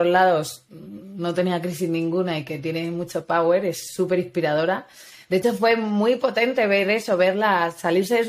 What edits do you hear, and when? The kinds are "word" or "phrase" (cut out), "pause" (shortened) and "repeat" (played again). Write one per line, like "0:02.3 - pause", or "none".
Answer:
none